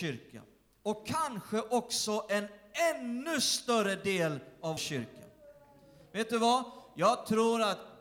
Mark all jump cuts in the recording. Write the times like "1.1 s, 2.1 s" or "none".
4.8 s